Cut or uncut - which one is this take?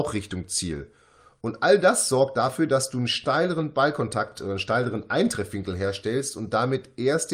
uncut